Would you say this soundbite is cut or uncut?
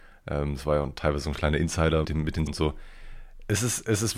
cut